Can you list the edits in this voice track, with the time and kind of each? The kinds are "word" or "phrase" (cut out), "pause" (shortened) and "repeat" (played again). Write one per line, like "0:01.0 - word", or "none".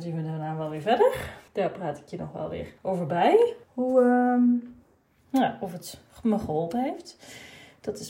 0:01.5 - pause
0:02.8 - pause
0:03.6 - pause